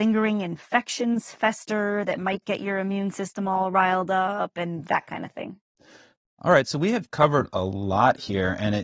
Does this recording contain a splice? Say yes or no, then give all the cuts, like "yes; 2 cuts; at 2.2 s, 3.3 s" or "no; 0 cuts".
no; 0 cuts